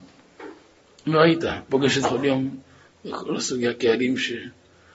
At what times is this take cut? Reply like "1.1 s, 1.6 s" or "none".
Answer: 1.7 s, 2.0 s